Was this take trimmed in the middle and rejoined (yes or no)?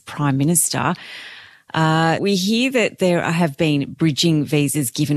yes